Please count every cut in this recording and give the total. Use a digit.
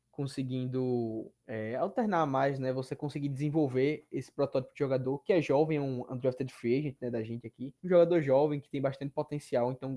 2